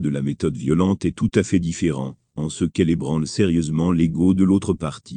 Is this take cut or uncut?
uncut